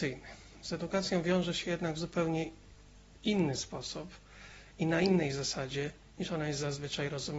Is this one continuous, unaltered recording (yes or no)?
yes